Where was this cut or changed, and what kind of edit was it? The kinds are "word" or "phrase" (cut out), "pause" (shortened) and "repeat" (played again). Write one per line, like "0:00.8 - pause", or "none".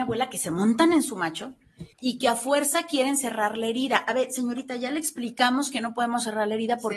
0:01.9 - pause